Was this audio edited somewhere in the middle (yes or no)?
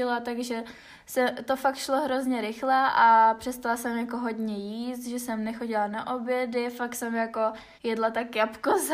yes